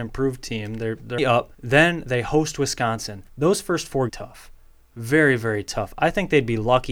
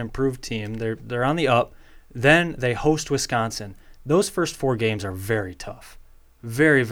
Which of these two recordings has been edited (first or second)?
first